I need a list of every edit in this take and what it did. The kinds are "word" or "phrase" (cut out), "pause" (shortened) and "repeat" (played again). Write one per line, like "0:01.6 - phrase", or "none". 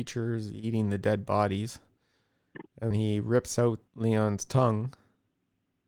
0:02.9 - word
0:03.9 - pause